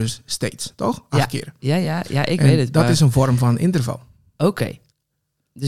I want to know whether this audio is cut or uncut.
uncut